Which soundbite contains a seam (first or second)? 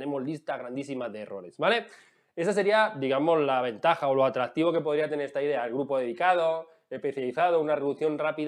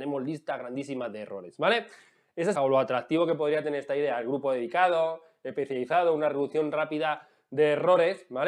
second